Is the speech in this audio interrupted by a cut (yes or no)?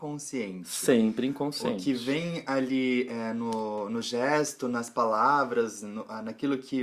no